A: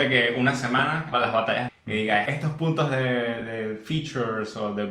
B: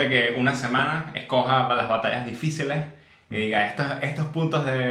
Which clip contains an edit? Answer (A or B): A